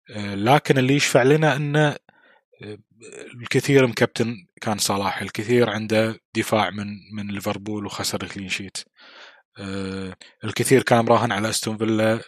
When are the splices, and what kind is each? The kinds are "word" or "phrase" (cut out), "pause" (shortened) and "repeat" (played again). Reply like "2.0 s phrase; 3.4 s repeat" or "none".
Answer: 10.2 s pause